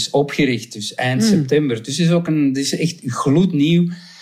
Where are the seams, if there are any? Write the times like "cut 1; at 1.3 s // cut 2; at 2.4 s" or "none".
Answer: none

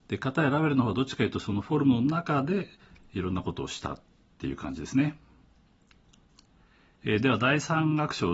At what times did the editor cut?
none

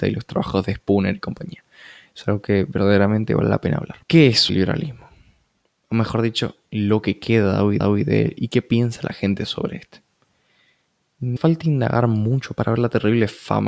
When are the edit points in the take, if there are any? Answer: cut 1; at 4.0 s // cut 2; at 4.5 s // cut 3; at 7.8 s // cut 4; at 11.4 s

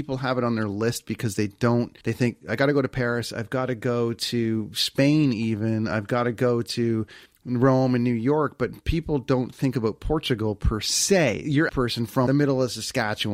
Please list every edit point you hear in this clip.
cut 1; at 2.0 s // cut 2; at 7.3 s // cut 3; at 11.7 s // cut 4; at 12.3 s

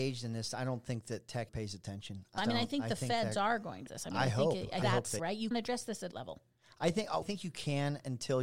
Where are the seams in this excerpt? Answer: cut 1; at 1.5 s // cut 2; at 2.4 s // cut 3; at 3.9 s // cut 4; at 4.8 s // cut 5; at 5.2 s // cut 6; at 5.5 s // cut 7; at 6.1 s // cut 8; at 7.2 s

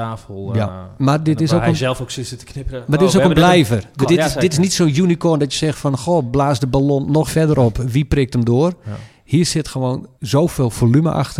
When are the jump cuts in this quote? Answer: cut 1; at 4.0 s // cut 2; at 7.3 s // cut 3; at 10.1 s

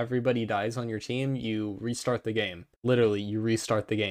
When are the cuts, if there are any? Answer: cut 1; at 2.7 s

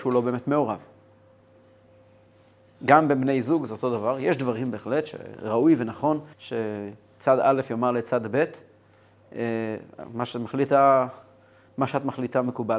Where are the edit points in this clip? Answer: cut 1; at 6.3 s

